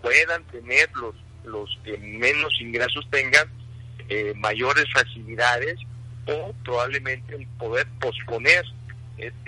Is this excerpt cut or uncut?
uncut